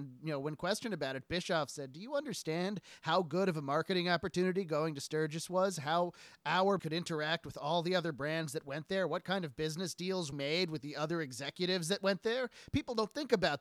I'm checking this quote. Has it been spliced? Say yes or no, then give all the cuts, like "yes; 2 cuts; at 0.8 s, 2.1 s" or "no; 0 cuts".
yes; 2 cuts; at 6.8 s, 10.3 s